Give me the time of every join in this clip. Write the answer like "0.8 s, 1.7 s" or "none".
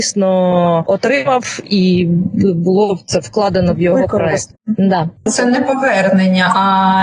none